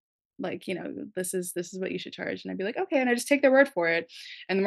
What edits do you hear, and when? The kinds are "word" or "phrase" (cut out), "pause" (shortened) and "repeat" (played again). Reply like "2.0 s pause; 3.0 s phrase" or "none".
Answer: none